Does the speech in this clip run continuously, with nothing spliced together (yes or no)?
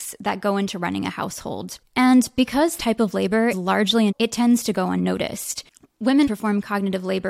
no